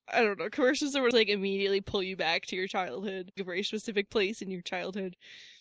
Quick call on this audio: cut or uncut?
cut